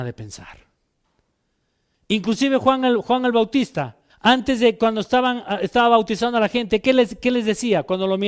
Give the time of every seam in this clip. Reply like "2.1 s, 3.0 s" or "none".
4.1 s